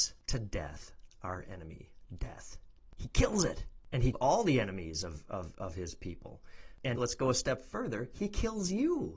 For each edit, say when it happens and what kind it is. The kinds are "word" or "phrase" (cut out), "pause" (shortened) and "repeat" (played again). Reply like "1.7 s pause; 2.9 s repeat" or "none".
4.1 s word; 7.0 s word